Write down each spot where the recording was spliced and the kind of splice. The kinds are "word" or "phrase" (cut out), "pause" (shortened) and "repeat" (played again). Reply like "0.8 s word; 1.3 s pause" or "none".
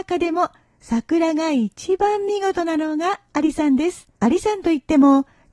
4.1 s pause